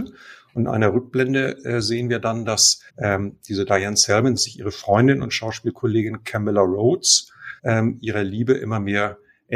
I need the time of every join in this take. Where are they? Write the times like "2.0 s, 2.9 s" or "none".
2.9 s, 4.4 s, 7.6 s

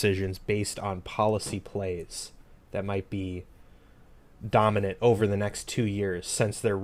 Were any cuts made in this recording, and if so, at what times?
none

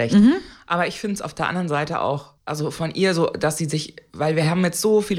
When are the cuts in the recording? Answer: 2.4 s

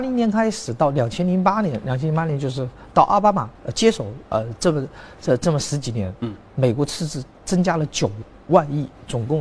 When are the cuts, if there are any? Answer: 3.6 s, 7.3 s

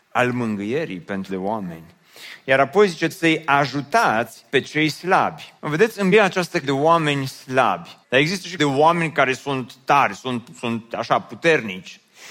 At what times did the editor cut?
1.3 s, 3.1 s, 4.5 s, 5.6 s, 6.1 s, 6.6 s, 8.0 s, 8.6 s

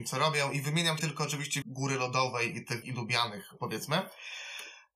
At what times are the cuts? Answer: 1.0 s, 1.6 s, 2.8 s, 3.6 s

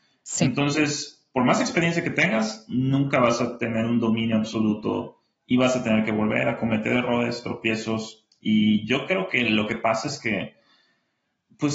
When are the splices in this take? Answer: none

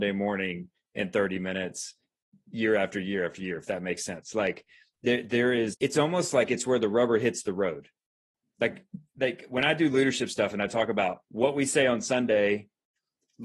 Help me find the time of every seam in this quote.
5.7 s, 9.1 s, 11.2 s

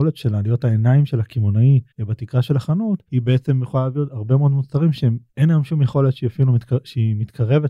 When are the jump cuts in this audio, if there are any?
1.9 s, 3.1 s, 5.3 s

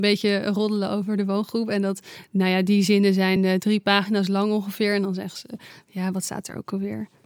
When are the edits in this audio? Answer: none

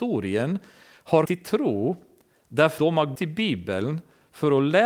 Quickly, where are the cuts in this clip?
1.2 s, 2.8 s, 3.1 s

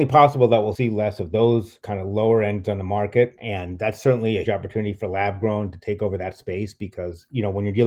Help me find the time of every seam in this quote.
2.6 s, 4.5 s

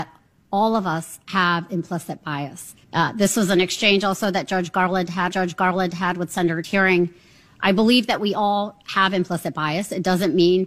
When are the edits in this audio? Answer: 2.8 s, 5.3 s, 6.6 s

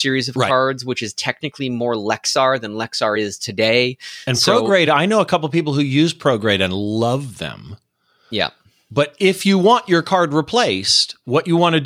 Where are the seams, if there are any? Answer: none

